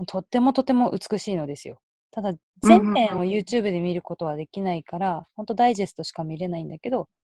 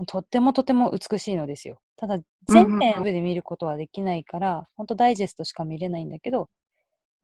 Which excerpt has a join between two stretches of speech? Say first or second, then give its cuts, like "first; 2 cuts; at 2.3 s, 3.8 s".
second; 2 cuts; at 1.8 s, 3.0 s